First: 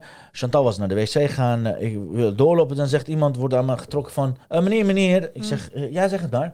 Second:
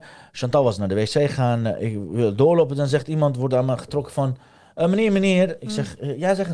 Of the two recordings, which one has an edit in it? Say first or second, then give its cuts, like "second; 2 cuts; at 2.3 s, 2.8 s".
first; 1 cut; at 4.4 s